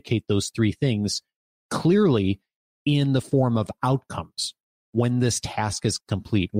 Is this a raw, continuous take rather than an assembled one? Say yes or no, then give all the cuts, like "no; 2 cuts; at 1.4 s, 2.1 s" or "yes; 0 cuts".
yes; 0 cuts